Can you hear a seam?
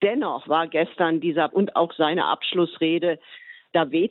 yes; 1 cut; at 1.5 s

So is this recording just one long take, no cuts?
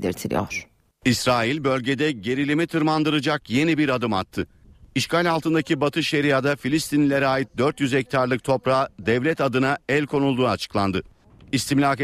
yes; 0 cuts

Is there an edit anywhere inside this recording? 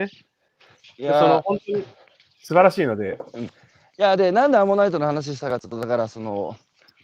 no; 0 cuts

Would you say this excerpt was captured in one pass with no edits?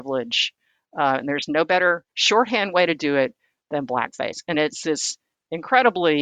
yes; 0 cuts

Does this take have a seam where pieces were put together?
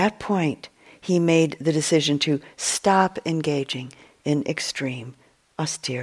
no; 0 cuts

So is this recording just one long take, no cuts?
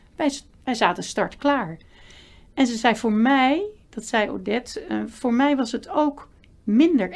yes; 0 cuts

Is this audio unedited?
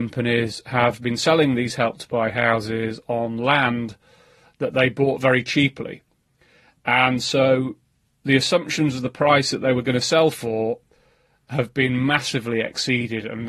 yes; 0 cuts

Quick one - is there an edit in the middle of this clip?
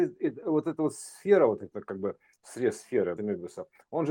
yes; 2 cuts; at 1.7 s, 3.2 s

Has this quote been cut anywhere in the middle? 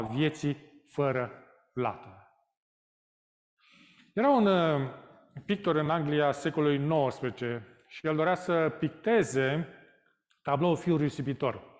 no; 0 cuts

